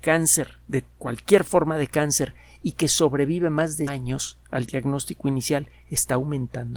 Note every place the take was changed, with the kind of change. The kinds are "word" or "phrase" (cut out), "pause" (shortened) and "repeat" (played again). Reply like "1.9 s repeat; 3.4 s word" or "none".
3.9 s word